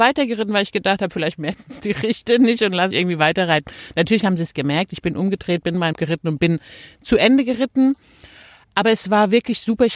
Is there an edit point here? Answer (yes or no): yes